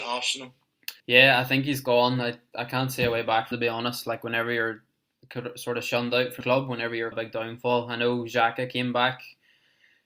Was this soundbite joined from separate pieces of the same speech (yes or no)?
yes